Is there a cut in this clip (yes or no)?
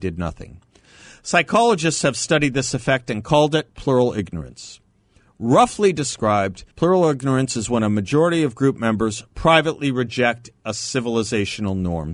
yes